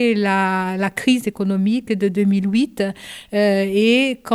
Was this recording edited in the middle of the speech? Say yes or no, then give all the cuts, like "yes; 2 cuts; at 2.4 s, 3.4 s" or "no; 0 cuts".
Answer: no; 0 cuts